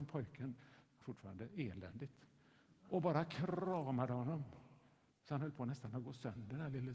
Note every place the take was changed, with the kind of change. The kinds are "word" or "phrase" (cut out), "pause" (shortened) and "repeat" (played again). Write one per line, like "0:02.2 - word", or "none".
0:01.0 - word
0:02.8 - pause
0:05.1 - pause